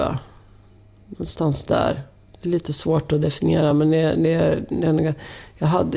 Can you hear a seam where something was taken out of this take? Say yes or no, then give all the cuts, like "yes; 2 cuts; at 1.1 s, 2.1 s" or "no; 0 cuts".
no; 0 cuts